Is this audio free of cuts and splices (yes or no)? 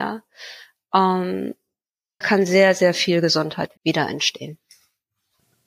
no